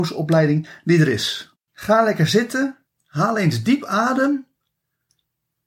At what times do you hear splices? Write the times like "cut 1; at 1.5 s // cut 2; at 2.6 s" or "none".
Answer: cut 1; at 1.6 s